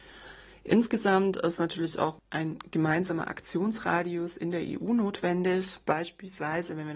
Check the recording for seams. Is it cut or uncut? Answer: uncut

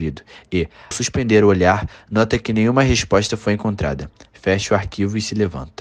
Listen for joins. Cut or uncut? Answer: cut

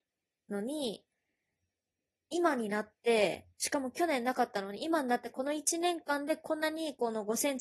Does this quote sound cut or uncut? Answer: uncut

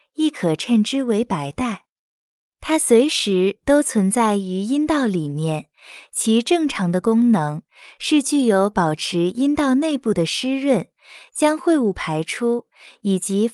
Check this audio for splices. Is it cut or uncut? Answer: uncut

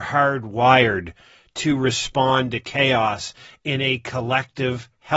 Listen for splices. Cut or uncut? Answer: uncut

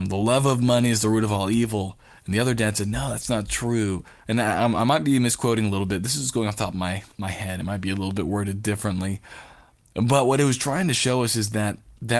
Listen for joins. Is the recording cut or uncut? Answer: uncut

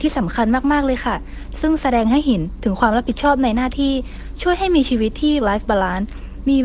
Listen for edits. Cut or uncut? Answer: cut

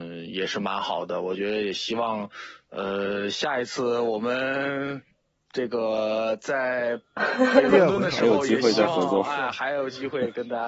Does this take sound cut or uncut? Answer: uncut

